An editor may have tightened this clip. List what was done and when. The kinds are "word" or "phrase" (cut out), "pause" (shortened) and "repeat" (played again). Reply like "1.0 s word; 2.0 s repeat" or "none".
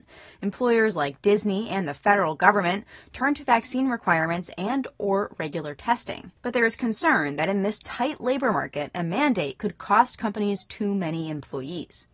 6.4 s pause